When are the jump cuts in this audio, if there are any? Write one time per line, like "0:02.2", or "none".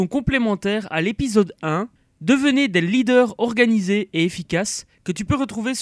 0:02.0